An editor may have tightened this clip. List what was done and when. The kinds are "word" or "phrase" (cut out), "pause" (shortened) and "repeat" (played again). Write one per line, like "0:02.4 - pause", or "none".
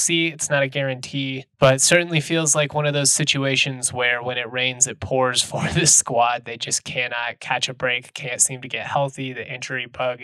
0:01.5 - pause